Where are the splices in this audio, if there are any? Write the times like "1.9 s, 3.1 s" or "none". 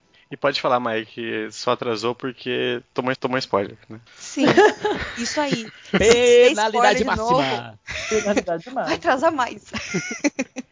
3.1 s, 4.1 s

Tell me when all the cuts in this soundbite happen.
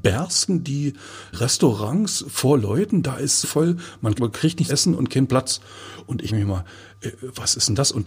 1.3 s, 3.4 s, 4.2 s, 4.7 s, 6.3 s

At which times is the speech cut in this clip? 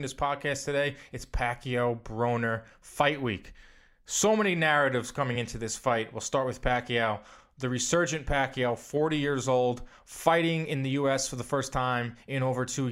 none

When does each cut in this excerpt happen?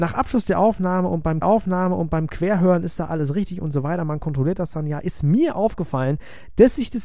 1.4 s

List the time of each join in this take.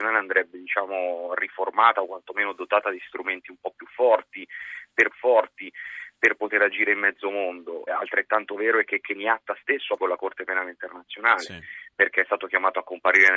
5.1 s, 7.9 s, 10.0 s

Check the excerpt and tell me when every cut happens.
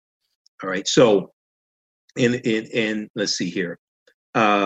none

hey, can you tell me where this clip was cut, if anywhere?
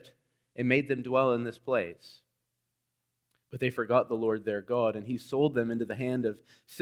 none

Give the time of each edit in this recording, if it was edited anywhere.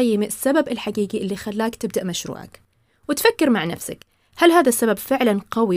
none

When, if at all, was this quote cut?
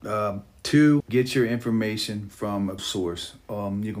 1.0 s, 2.8 s

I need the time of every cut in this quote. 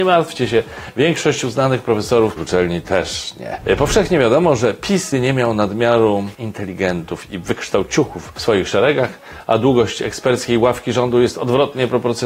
2.4 s, 5.1 s

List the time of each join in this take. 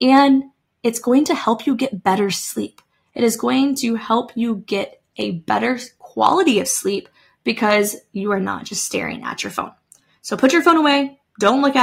none

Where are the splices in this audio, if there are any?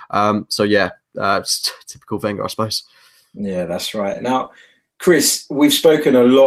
none

